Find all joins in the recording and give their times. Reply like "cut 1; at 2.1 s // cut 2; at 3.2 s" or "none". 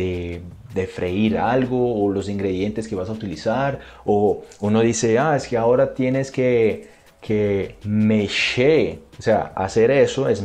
none